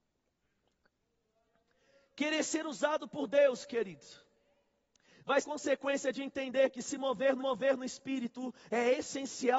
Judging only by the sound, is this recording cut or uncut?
cut